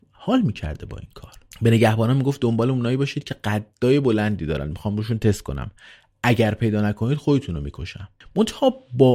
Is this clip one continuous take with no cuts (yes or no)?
yes